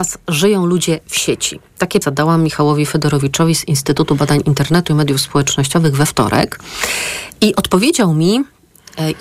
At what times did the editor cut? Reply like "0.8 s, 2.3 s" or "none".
2.0 s